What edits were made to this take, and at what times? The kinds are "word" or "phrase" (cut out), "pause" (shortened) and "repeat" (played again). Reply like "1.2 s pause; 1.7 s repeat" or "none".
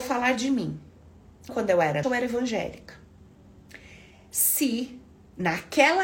1.5 s word; 2.0 s word